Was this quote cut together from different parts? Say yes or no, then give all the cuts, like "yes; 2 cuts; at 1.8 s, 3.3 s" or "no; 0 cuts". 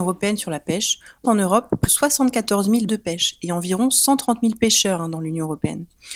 yes; 3 cuts; at 1.2 s, 1.9 s, 2.9 s